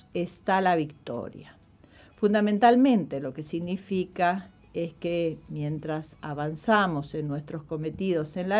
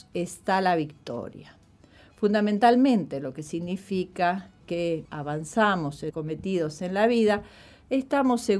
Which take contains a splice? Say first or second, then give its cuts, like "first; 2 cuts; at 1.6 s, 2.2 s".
second; 3 cuts; at 4.6 s, 5.1 s, 6.1 s